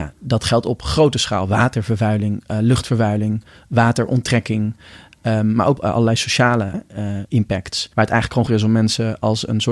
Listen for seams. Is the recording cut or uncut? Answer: cut